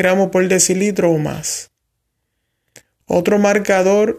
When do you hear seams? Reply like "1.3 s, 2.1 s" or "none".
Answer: none